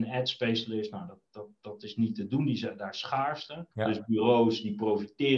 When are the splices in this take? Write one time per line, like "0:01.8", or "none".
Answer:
0:03.7